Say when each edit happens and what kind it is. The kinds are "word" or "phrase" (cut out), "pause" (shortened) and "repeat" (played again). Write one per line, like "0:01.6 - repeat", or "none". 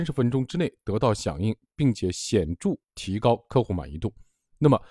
0:02.8 - pause